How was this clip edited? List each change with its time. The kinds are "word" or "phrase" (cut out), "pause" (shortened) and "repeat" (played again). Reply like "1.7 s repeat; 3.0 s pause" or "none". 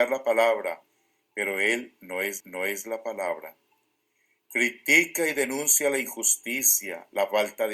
2.4 s repeat